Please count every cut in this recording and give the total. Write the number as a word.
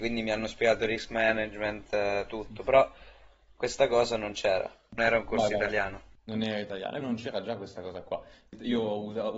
two